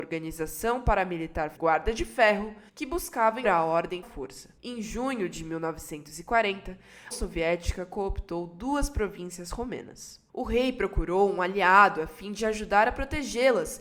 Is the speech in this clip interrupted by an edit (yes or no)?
yes